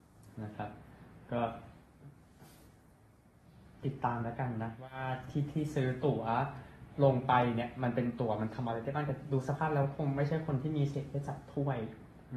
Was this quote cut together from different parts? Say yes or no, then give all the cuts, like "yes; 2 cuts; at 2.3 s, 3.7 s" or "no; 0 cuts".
no; 0 cuts